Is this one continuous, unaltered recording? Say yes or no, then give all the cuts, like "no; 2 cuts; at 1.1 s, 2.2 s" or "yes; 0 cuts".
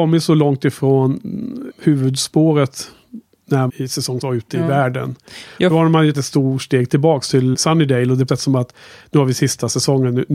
no; 7 cuts; at 1.7 s, 3.7 s, 4.2 s, 5.7 s, 6.1 s, 7.5 s, 8.3 s